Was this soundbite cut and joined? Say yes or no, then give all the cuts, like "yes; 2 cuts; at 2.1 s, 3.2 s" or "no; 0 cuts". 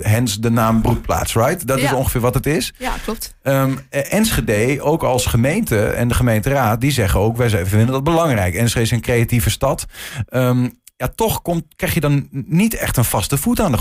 no; 0 cuts